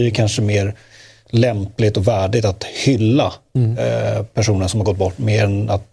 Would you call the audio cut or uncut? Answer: uncut